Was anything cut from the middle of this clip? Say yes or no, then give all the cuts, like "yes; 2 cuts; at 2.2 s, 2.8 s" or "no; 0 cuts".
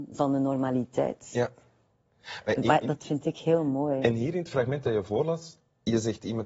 no; 0 cuts